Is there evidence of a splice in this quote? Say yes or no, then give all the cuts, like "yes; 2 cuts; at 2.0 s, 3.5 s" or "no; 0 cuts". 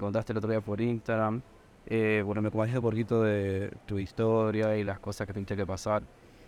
no; 0 cuts